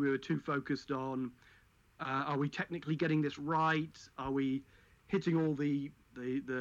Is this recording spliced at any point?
no; 0 cuts

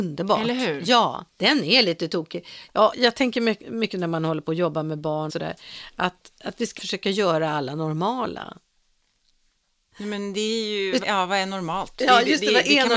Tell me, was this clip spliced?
yes; 5 cuts; at 1.3 s, 2.9 s, 5.3 s, 6.8 s, 11.0 s

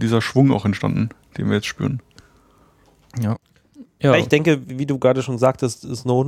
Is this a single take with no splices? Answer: yes; 0 cuts

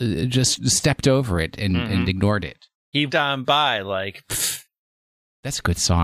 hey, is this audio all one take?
no; 1 cut; at 3.1 s

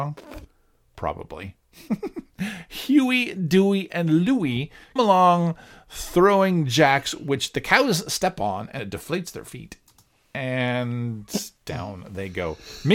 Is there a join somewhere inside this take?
yes; 2 cuts; at 5.0 s, 8.8 s

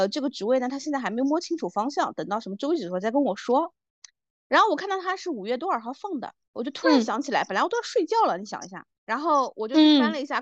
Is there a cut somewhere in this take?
yes; 2 cuts; at 6.4 s, 8.9 s

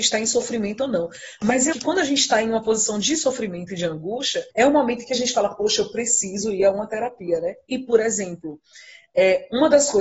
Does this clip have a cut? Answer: yes; 2 cuts; at 1.7 s, 4.5 s

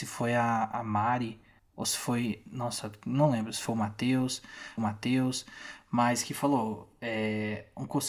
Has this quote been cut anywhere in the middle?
yes; 1 cut; at 4.8 s

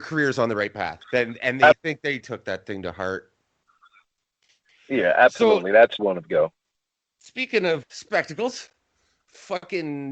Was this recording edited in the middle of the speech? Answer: yes; 5 cuts; at 1.0 s, 1.7 s, 2.2 s, 6.0 s, 7.8 s

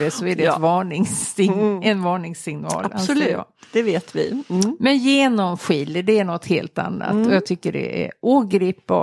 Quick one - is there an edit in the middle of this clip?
no; 0 cuts

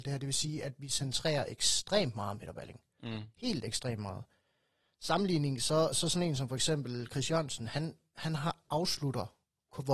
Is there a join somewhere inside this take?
no; 0 cuts

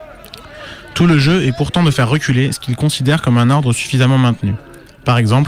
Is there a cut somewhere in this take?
no; 0 cuts

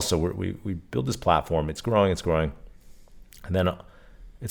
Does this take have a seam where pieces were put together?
no; 0 cuts

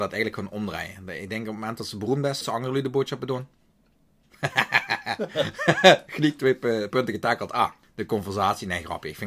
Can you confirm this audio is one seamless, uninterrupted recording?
no; 3 cuts; at 2.4 s, 6.9 s, 7.8 s

